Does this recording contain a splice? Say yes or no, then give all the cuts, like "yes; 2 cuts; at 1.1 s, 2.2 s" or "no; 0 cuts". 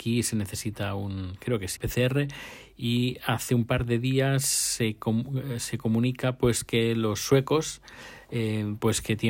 yes; 1 cut; at 1.8 s